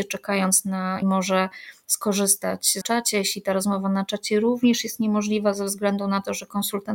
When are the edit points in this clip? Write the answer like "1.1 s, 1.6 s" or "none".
1.0 s, 2.8 s